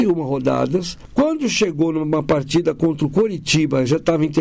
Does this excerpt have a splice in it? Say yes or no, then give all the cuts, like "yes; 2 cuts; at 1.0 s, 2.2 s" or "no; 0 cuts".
no; 0 cuts